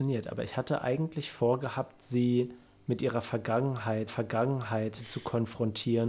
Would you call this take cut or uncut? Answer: cut